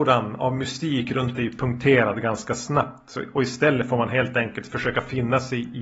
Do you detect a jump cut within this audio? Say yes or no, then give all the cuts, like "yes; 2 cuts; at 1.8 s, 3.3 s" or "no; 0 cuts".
yes; 2 cuts; at 1.3 s, 3.3 s